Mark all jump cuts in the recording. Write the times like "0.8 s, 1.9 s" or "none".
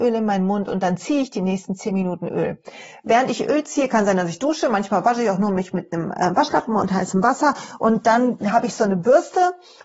none